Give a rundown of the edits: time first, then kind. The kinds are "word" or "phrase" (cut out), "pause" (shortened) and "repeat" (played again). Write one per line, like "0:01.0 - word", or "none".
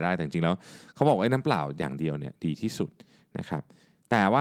none